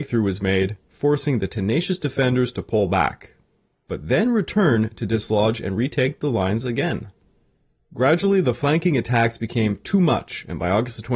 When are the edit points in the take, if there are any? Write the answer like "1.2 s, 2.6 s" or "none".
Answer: none